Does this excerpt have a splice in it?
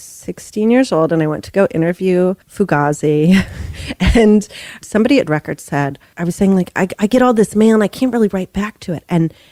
yes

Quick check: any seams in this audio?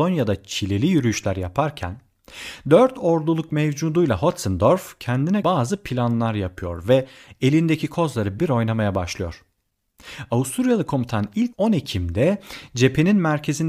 yes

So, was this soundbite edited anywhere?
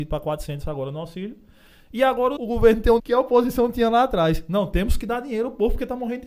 yes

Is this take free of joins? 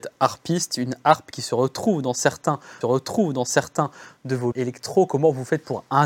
no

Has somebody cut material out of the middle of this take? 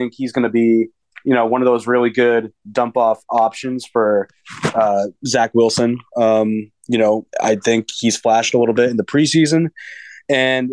yes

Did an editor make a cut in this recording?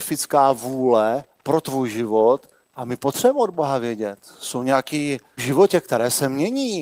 yes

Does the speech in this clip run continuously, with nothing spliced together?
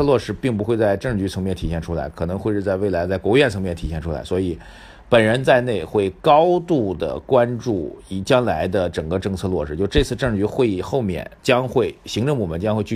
no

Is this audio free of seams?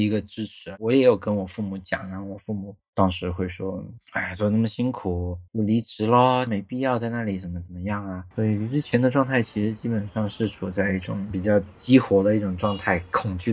no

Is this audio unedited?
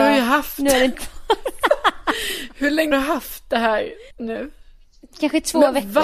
no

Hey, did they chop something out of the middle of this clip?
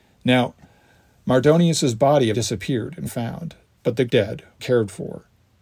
yes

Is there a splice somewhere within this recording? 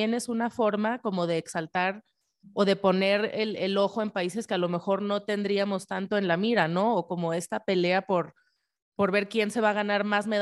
no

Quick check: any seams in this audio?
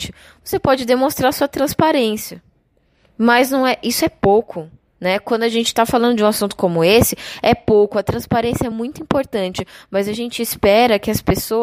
no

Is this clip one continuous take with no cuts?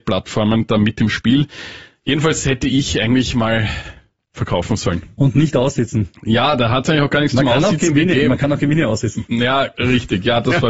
yes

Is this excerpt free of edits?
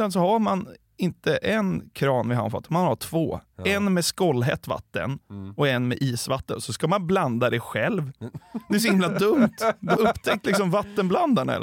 no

